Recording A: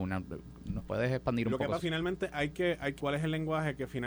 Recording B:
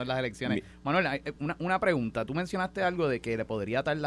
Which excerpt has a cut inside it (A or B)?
A